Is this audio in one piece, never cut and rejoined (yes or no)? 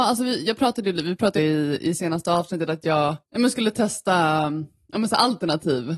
no